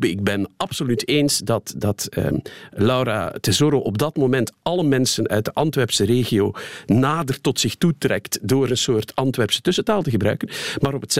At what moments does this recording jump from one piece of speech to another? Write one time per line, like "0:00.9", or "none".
none